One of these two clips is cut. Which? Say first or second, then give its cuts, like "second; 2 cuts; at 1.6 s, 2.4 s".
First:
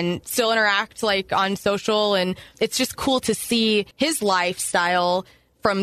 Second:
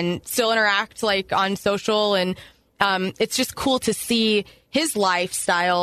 first; 2 cuts; at 2.5 s, 3.9 s